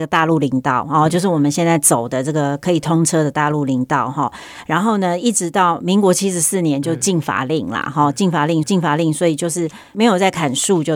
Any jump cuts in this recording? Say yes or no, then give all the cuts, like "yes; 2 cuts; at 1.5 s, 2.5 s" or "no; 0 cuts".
yes; 1 cut; at 8.6 s